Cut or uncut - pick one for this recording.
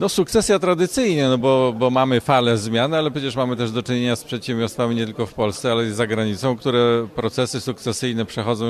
uncut